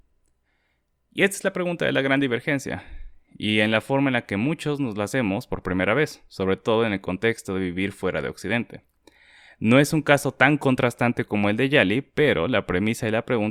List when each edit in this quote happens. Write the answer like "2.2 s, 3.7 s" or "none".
none